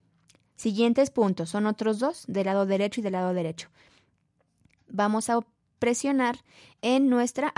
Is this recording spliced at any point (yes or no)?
no